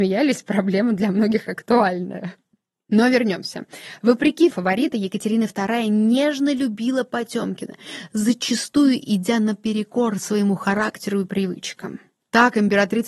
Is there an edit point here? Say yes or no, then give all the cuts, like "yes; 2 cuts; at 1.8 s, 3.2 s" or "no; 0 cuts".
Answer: yes; 1 cut; at 4.5 s